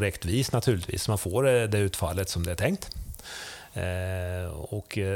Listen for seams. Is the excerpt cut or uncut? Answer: uncut